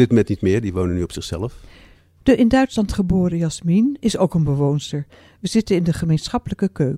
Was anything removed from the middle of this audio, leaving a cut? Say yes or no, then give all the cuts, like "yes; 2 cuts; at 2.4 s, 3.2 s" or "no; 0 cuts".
no; 0 cuts